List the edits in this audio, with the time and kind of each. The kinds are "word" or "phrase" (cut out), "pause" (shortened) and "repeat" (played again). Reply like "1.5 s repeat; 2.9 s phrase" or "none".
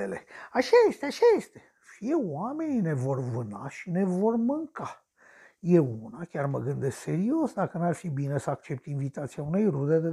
none